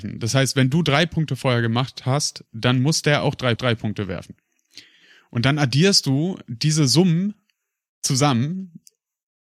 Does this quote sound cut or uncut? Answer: cut